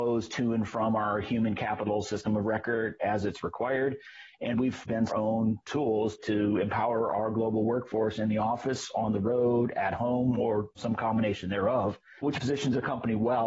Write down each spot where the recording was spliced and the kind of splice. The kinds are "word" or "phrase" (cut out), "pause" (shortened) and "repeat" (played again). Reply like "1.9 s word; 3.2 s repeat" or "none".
4.5 s word; 5.1 s phrase